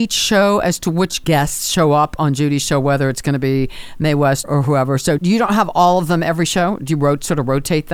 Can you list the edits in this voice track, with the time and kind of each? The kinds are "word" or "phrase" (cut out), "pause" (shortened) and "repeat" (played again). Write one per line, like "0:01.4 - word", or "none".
0:01.2 - word
0:04.4 - word
0:05.2 - word